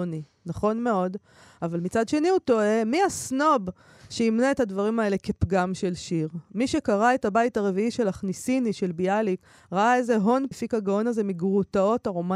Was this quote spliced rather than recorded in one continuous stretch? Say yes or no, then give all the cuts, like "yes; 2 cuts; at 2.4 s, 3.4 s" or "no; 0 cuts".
yes; 1 cut; at 10.5 s